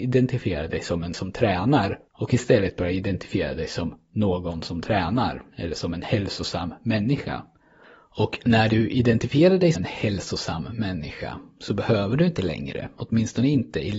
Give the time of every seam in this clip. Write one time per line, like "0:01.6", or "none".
0:01.1
0:02.1
0:09.7